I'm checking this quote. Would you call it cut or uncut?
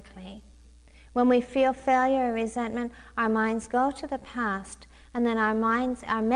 uncut